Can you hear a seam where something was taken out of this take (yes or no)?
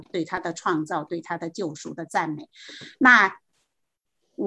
no